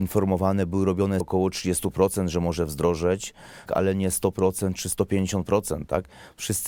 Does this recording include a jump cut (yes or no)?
yes